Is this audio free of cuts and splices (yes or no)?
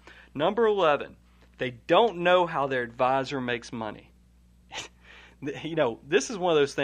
yes